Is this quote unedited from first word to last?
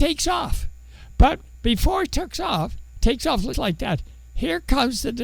no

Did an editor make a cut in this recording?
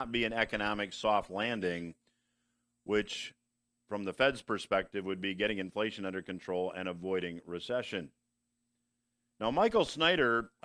no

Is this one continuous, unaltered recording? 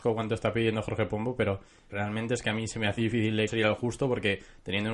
no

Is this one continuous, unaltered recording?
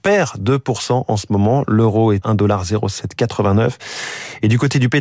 no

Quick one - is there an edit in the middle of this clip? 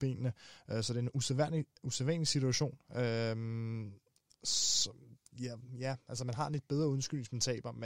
no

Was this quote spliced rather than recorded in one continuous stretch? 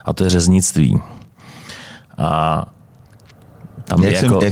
no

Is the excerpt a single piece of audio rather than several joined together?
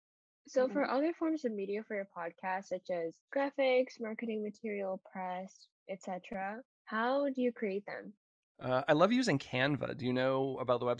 no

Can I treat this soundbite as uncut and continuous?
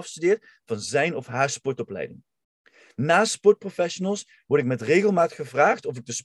yes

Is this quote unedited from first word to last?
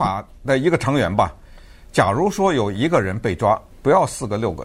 no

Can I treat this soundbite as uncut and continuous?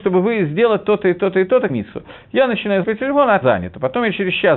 no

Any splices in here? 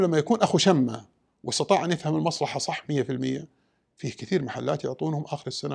no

